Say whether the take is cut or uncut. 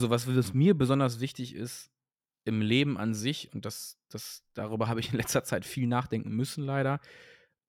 uncut